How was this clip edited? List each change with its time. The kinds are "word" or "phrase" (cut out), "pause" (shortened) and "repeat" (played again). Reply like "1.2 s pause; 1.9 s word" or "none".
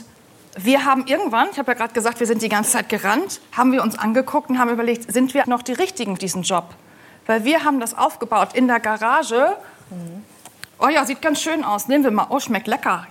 5.4 s word; 6.2 s word